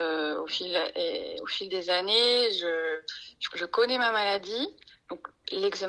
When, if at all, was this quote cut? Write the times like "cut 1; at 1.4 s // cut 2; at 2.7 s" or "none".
cut 1; at 3.5 s

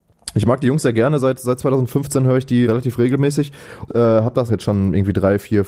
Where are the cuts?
cut 1; at 2.6 s // cut 2; at 3.9 s // cut 3; at 4.5 s

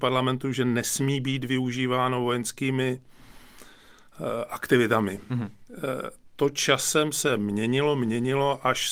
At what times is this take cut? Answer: none

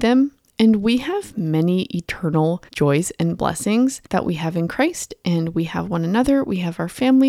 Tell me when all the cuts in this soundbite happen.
cut 1; at 2.7 s // cut 2; at 4.1 s

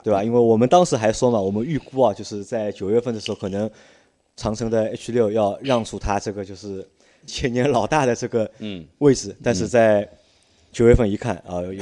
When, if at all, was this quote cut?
cut 1; at 7.3 s

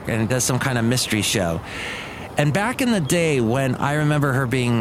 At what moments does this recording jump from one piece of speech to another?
none

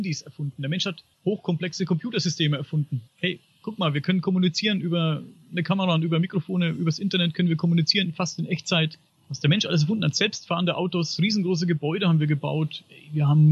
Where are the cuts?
cut 1; at 1.1 s // cut 2; at 3.1 s // cut 3; at 9.1 s

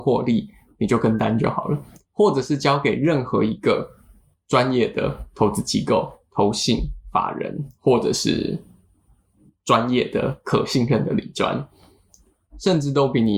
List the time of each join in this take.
none

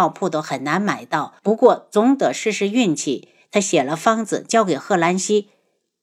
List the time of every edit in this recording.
cut 1; at 1.4 s

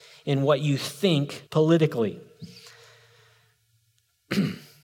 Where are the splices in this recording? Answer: cut 1; at 1.5 s

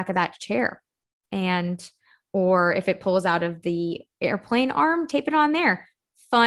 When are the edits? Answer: none

